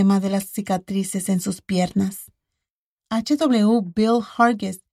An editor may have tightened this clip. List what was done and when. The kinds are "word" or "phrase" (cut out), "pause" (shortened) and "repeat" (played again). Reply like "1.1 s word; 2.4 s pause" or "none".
none